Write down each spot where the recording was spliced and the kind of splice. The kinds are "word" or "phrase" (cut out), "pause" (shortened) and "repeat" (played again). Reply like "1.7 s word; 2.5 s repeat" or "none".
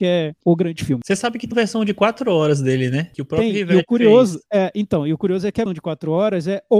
1.5 s word; 5.7 s word